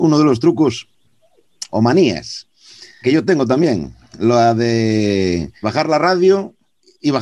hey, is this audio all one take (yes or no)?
no